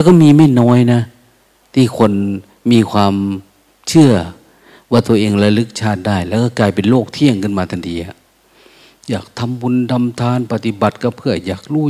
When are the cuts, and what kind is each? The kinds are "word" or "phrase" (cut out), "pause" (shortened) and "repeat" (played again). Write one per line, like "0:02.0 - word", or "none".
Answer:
none